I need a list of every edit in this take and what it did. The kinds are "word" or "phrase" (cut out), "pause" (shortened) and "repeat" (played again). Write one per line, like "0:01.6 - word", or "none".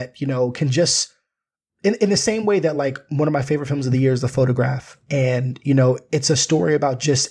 none

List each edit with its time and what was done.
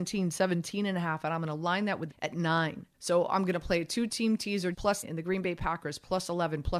0:02.1 - phrase
0:02.9 - pause
0:04.7 - word
0:05.0 - word

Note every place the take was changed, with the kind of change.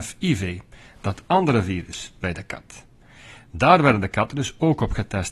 none

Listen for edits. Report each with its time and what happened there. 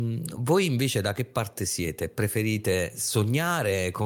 none

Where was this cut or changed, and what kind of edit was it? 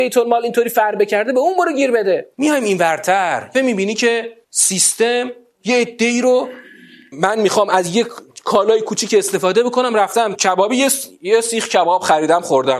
0:02.3 - pause
0:03.5 - word
0:04.4 - pause
0:07.1 - word
0:10.3 - word

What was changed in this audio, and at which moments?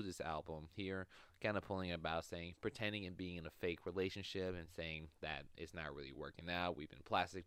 none

